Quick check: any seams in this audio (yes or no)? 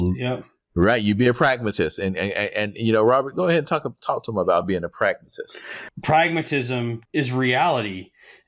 no